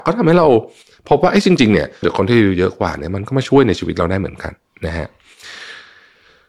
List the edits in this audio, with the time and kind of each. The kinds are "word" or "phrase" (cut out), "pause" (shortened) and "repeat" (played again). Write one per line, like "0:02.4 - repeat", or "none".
0:02.0 - word